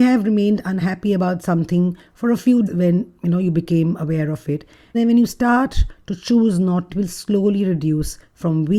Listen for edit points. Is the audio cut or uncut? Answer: cut